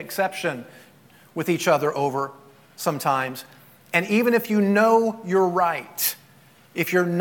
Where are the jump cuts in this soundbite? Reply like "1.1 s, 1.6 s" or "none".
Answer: none